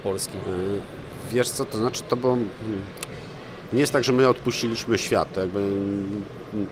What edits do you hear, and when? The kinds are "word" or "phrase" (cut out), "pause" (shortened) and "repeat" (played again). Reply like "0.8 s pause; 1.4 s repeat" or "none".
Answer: none